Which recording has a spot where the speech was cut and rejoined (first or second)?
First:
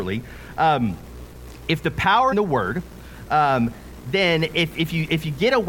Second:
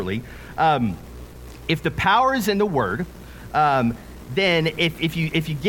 first